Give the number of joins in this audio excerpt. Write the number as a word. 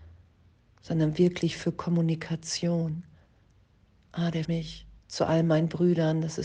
two